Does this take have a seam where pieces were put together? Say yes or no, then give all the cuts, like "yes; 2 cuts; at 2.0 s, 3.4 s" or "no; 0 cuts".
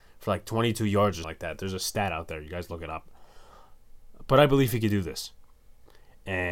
yes; 1 cut; at 1.2 s